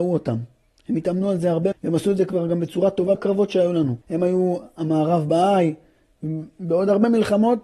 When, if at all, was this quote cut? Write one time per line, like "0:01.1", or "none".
0:01.7
0:03.1
0:04.0